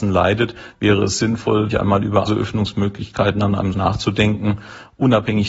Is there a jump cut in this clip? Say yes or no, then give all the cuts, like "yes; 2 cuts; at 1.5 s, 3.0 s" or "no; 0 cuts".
yes; 3 cuts; at 1.7 s, 2.3 s, 3.7 s